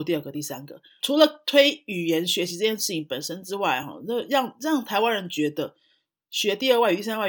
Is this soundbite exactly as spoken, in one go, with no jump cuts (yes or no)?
yes